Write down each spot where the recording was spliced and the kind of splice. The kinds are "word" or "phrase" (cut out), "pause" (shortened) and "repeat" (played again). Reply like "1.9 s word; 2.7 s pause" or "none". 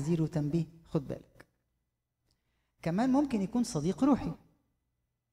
none